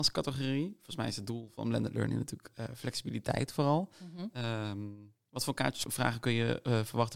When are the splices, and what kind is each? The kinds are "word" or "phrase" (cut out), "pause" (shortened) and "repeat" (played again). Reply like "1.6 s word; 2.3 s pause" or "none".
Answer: 5.9 s word